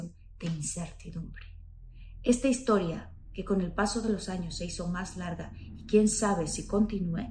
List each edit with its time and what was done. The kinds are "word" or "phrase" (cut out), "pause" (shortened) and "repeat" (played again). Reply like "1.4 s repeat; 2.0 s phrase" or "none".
none